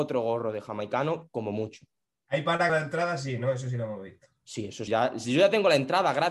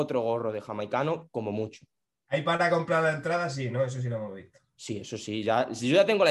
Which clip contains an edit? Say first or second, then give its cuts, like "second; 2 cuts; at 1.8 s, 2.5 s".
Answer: first; 2 cuts; at 2.7 s, 4.9 s